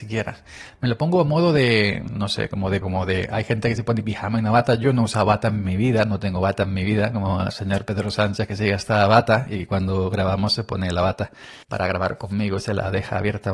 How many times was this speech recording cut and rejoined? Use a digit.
2